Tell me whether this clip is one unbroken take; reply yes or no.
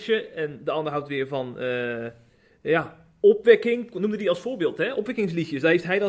yes